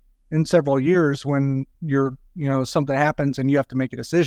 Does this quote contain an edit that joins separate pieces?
yes; 1 cut; at 1.7 s

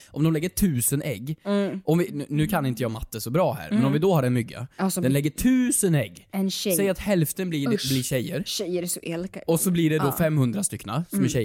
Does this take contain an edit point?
no; 0 cuts

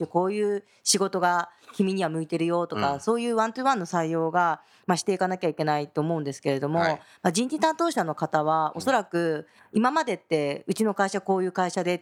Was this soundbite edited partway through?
no; 0 cuts

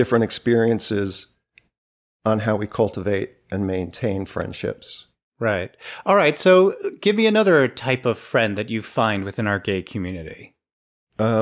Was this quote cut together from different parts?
no; 0 cuts

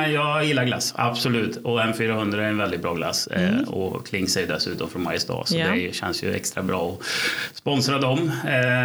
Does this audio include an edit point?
no; 0 cuts

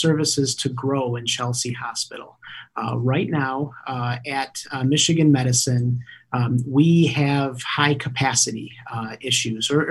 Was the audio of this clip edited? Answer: no; 0 cuts

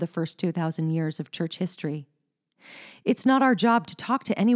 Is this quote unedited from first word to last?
yes; 0 cuts

